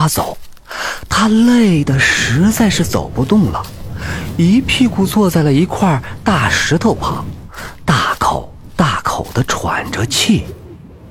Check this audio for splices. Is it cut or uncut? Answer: uncut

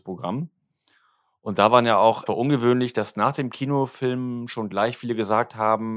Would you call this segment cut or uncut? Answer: cut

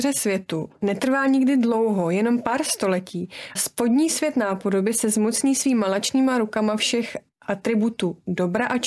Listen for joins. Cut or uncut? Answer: cut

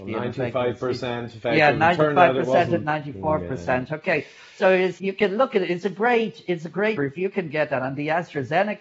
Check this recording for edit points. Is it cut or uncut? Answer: cut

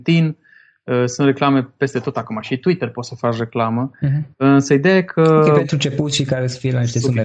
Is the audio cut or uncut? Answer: uncut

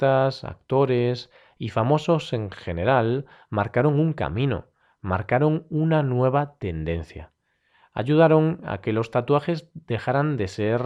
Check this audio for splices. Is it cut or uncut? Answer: uncut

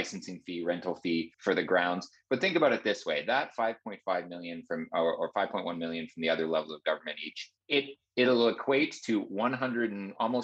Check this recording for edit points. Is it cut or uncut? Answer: cut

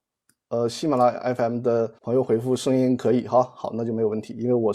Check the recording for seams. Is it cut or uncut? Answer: cut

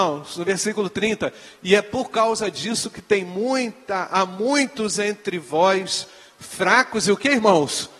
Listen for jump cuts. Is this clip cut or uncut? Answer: uncut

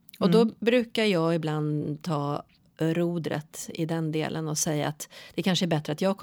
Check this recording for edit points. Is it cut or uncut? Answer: uncut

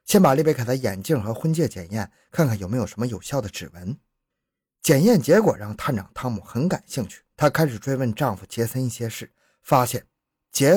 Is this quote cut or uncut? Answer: cut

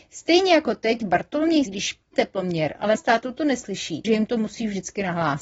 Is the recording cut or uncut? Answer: cut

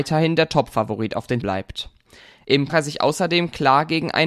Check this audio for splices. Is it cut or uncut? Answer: cut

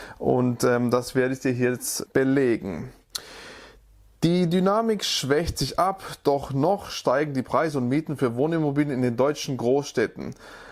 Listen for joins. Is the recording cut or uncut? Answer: uncut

